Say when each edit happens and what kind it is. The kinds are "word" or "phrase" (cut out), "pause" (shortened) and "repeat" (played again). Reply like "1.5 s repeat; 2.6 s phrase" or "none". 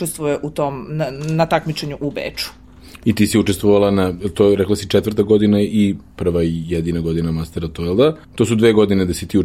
8.2 s pause